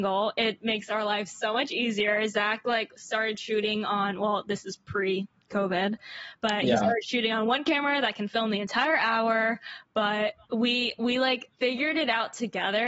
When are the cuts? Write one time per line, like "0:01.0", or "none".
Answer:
0:10.4
0:11.6

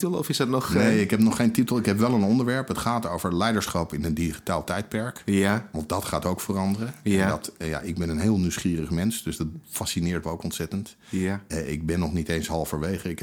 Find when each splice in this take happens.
0:10.2

